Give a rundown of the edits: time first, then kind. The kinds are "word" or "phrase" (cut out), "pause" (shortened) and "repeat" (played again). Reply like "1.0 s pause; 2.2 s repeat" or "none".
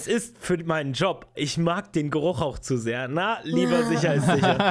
1.3 s word